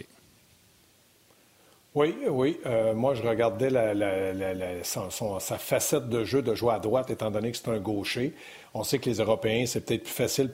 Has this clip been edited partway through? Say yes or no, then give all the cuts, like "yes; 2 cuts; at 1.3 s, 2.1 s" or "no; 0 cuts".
no; 0 cuts